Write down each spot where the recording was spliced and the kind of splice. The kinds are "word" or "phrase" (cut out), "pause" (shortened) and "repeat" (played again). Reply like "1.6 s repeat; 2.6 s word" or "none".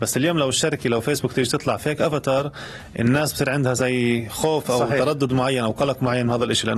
none